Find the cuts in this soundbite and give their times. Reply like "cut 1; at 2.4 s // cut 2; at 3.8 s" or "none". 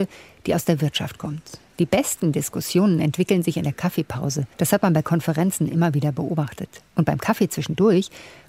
cut 1; at 1.7 s // cut 2; at 4.5 s // cut 3; at 6.9 s